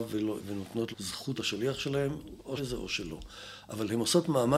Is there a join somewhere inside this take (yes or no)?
yes